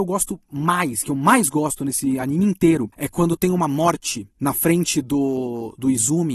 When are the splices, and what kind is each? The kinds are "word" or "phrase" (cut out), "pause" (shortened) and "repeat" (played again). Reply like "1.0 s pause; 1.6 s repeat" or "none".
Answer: none